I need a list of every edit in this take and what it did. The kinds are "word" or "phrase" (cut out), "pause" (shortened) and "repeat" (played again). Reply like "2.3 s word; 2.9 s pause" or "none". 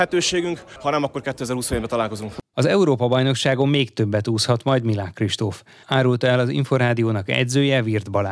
none